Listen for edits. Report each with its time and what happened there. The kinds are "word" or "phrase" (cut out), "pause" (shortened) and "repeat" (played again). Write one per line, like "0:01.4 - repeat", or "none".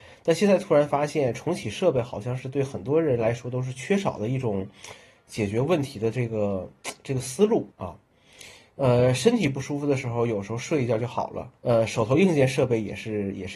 0:07.7 - pause
0:11.6 - pause